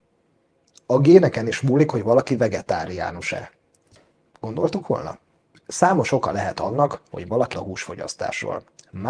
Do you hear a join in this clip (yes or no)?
yes